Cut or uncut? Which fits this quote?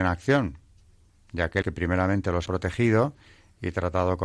cut